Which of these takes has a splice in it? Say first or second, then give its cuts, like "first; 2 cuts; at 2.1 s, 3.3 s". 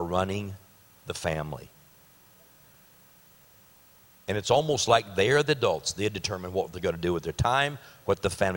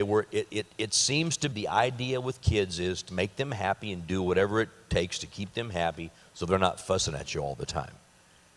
second; 2 cuts; at 1.5 s, 3.1 s